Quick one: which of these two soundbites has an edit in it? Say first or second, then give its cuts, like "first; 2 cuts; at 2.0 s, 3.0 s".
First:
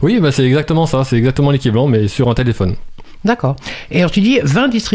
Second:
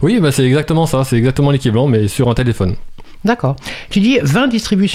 second; 1 cut; at 3.9 s